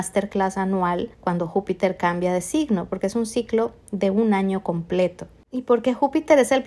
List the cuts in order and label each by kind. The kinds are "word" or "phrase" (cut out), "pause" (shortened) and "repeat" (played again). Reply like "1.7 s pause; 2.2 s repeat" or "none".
1.1 s pause

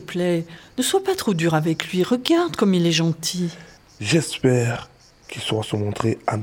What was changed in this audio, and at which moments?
none

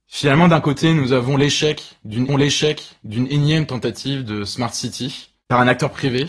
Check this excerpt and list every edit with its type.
2.3 s repeat

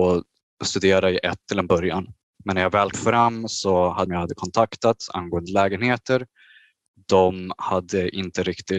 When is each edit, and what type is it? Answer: 1.4 s word; 2.9 s word; 4.1 s phrase

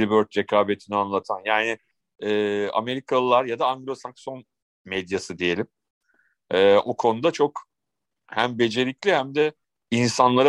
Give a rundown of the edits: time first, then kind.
none

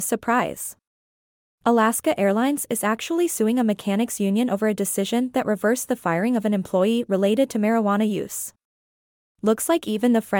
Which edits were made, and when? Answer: none

